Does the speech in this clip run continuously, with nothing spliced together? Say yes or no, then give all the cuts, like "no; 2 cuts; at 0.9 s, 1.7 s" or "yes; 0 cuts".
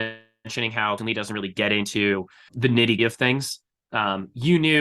no; 3 cuts; at 1.0 s, 2.5 s, 3.0 s